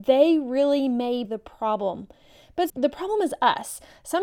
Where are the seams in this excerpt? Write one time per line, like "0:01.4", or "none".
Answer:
0:01.2
0:02.7